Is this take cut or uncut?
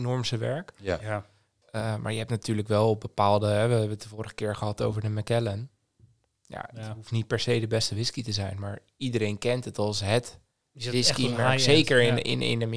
uncut